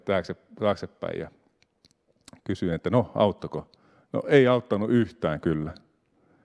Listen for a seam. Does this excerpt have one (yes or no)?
no